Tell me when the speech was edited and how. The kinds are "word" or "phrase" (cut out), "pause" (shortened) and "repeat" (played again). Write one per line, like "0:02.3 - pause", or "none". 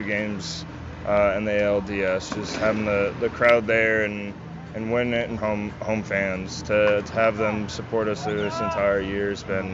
0:05.4 - phrase